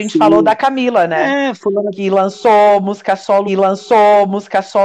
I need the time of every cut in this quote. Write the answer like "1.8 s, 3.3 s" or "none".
3.5 s